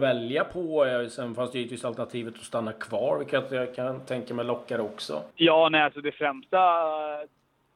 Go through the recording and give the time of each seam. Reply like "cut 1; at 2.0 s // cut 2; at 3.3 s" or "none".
cut 1; at 5.3 s